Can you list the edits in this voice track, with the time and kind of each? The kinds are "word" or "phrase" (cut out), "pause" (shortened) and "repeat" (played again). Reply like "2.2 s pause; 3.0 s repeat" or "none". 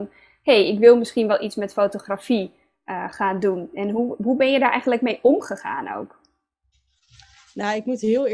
none